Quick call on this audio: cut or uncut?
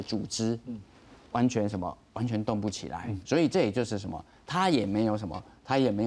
cut